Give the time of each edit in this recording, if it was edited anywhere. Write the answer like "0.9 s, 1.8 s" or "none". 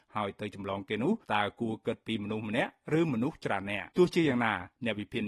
1.2 s, 3.9 s